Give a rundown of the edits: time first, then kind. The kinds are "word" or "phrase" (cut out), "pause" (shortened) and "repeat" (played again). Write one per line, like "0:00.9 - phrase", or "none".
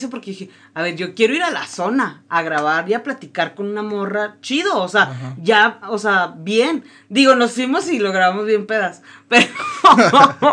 none